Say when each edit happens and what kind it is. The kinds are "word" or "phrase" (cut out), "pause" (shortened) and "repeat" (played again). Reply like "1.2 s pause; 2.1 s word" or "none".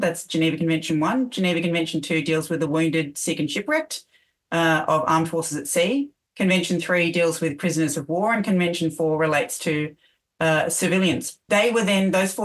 none